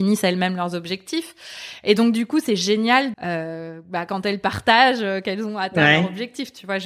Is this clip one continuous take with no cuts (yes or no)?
no